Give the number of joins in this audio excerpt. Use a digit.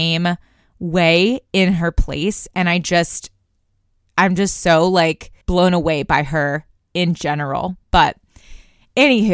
1